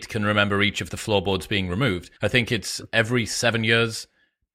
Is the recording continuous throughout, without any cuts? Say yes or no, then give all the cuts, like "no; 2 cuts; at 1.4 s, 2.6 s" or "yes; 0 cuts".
no; 1 cut; at 2.2 s